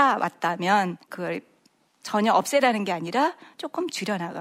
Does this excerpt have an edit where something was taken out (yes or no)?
yes